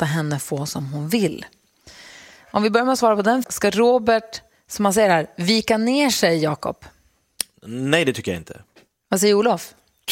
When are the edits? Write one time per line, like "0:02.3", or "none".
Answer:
0:03.4